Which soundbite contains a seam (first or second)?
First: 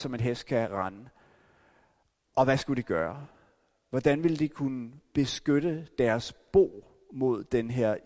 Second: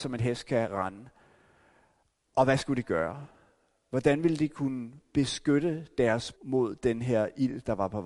second